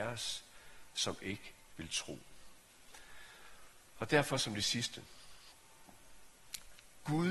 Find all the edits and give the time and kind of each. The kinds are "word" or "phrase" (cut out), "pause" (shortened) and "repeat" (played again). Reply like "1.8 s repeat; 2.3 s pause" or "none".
none